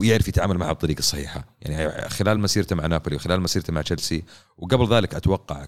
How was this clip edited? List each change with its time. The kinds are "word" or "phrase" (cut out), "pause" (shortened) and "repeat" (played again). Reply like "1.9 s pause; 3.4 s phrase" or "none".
none